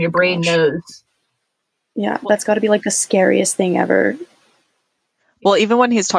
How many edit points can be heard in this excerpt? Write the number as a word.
zero